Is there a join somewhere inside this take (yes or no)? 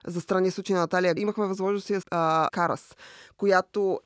yes